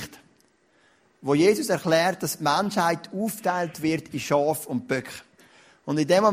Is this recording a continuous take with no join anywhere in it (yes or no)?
yes